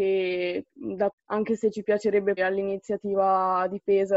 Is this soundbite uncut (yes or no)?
no